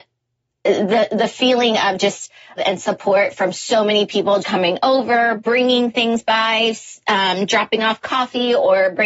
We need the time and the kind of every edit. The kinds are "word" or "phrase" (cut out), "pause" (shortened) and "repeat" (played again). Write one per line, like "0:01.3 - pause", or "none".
0:02.6 - word
0:04.4 - word